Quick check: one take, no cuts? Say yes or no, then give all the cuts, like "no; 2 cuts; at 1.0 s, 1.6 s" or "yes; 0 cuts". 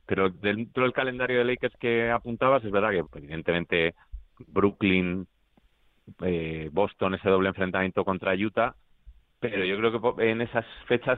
no; 1 cut; at 3.0 s